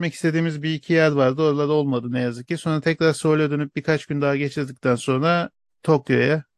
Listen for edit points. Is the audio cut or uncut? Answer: uncut